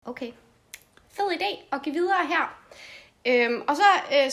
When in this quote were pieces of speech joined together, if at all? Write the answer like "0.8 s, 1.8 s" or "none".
none